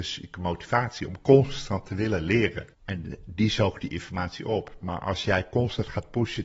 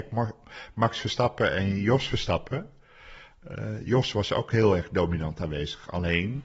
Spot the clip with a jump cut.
first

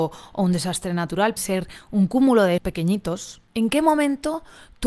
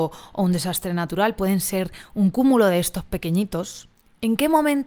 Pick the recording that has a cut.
first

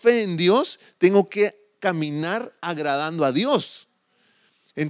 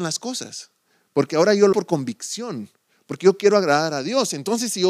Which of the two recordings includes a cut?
second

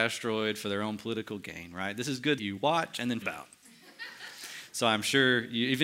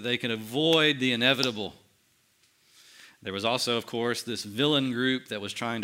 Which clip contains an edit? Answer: first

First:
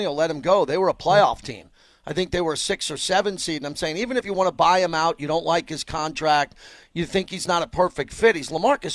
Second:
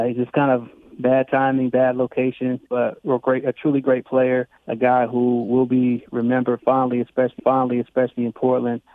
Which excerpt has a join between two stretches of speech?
second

